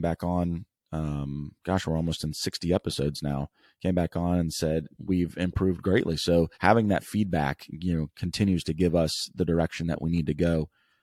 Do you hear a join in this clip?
yes; 2 cuts; at 4.9 s, 6.5 s

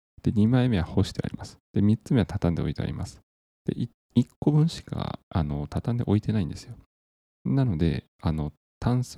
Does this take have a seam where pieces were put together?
yes; 1 cut; at 1.6 s

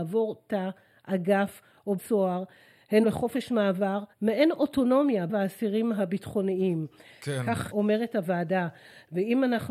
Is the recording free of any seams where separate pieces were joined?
no; 5 cuts; at 2.0 s, 3.0 s, 4.1 s, 5.3 s, 7.7 s

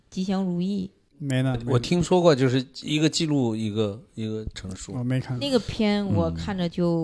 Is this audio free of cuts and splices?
yes; 0 cuts

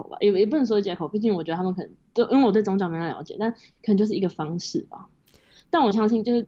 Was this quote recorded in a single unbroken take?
yes; 0 cuts

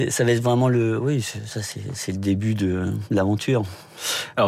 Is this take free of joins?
yes; 0 cuts

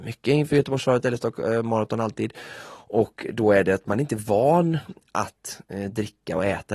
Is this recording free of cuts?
yes; 0 cuts

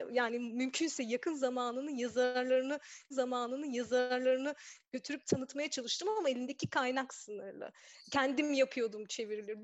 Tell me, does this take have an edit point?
yes; 1 cut; at 3.1 s

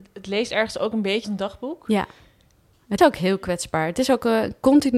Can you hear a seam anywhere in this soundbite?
yes; 2 cuts; at 1.2 s, 3.0 s

